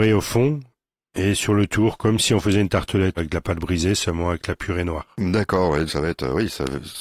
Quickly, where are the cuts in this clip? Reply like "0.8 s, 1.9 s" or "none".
3.2 s, 5.9 s